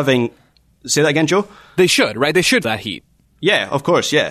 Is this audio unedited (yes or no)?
no